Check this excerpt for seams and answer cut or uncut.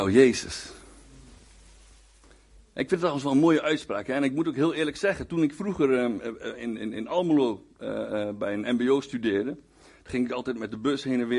uncut